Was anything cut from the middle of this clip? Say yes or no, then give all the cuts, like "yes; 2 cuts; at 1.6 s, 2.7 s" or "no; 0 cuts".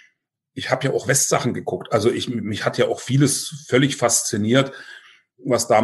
no; 0 cuts